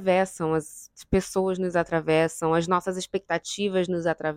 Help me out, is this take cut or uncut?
uncut